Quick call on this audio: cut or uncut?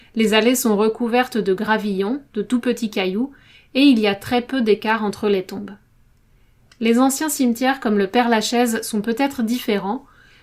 uncut